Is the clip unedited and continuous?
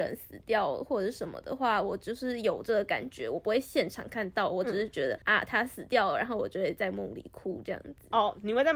no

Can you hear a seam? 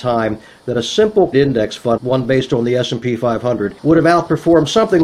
yes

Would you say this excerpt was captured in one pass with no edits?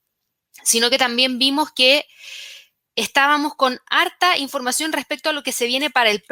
yes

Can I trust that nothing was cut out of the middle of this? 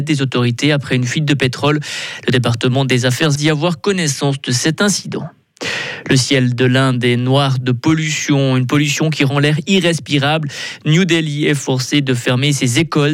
no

